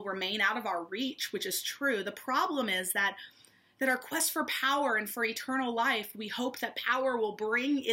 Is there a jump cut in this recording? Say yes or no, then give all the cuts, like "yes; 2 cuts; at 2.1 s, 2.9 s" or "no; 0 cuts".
no; 0 cuts